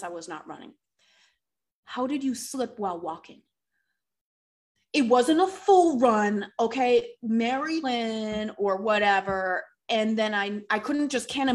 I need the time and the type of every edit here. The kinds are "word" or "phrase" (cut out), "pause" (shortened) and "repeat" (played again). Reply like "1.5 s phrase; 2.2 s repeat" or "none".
7.8 s phrase